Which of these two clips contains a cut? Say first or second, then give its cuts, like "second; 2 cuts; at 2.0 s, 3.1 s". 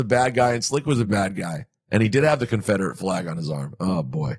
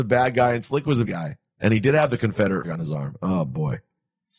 second; 2 cuts; at 1.1 s, 2.6 s